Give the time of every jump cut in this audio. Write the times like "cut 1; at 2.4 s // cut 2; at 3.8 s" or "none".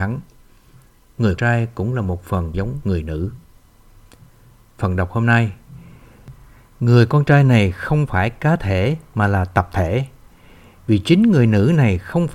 cut 1; at 1.4 s // cut 2; at 2.5 s